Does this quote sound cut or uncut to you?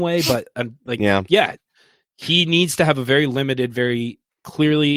uncut